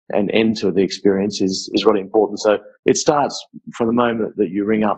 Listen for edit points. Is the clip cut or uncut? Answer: cut